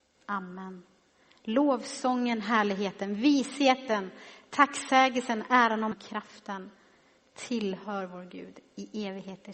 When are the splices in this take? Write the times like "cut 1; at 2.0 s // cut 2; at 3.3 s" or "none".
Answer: cut 1; at 5.9 s